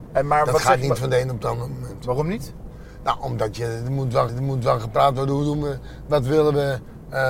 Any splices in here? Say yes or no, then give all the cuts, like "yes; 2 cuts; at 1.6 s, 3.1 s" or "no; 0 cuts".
yes; 1 cut; at 4.3 s